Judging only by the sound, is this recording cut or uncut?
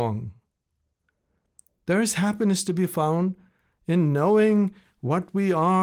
uncut